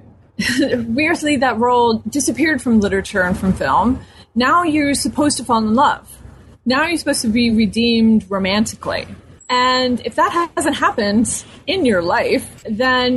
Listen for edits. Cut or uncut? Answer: uncut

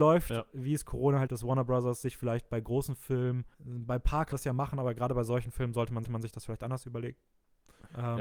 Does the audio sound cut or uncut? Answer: cut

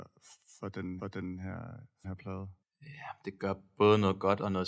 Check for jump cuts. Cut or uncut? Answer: cut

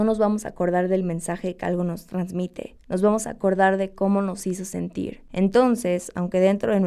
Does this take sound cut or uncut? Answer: uncut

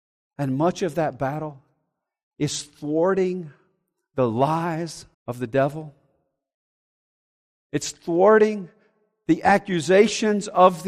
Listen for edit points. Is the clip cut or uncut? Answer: cut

